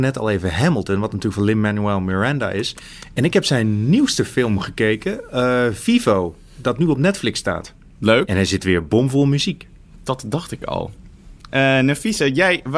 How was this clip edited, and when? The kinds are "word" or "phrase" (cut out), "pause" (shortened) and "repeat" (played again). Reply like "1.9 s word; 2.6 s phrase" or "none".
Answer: none